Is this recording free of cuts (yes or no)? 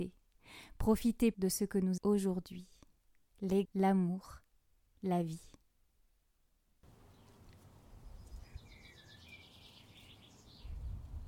no